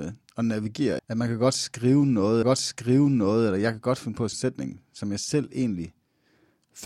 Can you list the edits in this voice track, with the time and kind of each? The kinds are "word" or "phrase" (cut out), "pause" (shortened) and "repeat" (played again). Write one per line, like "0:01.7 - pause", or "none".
0:01.0 - word
0:02.4 - repeat
0:04.3 - phrase